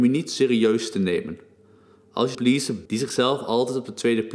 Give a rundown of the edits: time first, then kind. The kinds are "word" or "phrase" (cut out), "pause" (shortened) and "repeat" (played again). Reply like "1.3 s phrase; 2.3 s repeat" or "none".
2.3 s word; 2.9 s word